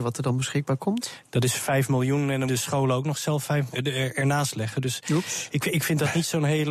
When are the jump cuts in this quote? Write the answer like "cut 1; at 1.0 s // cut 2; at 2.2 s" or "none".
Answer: cut 1; at 2.5 s // cut 2; at 3.7 s // cut 3; at 5.6 s

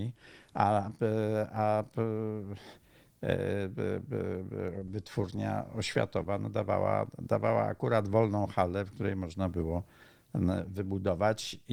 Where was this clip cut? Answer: none

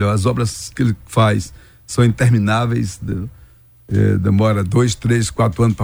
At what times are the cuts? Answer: none

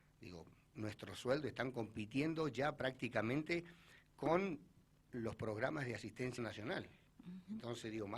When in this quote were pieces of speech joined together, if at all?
cut 1; at 6.4 s

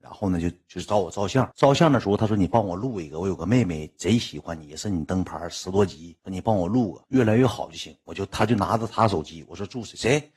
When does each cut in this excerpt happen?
cut 1; at 1.5 s // cut 2; at 6.2 s // cut 3; at 7.1 s

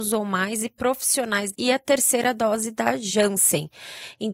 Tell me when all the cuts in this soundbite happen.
cut 1; at 1.5 s

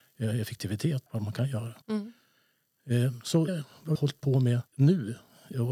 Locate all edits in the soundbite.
cut 1; at 1.1 s // cut 2; at 1.8 s // cut 3; at 3.5 s // cut 4; at 3.9 s // cut 5; at 4.7 s

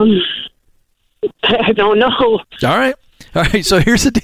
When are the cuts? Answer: cut 1; at 1.8 s

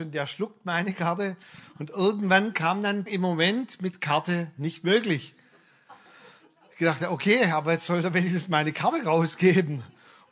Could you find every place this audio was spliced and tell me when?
cut 1; at 3.1 s

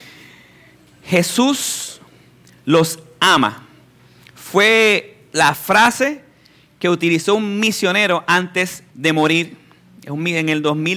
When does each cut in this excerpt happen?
cut 1; at 8.9 s

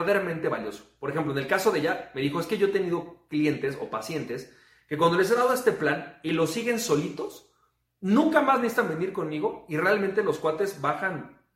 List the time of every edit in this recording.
none

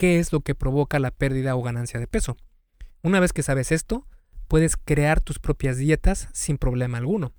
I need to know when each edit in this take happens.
none

